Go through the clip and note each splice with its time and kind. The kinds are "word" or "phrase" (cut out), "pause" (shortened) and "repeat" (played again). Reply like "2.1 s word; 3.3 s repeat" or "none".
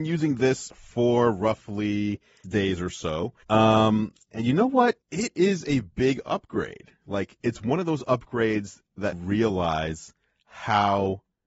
2.4 s word; 3.4 s pause; 5.0 s pause; 7.4 s word; 9.1 s phrase